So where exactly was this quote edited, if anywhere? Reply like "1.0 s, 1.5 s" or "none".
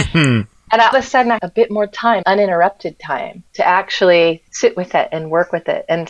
0.9 s, 1.4 s, 2.2 s, 3.5 s, 4.5 s